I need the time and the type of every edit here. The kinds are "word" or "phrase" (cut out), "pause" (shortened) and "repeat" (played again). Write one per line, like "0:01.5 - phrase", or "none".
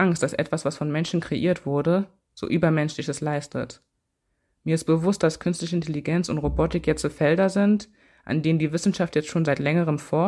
none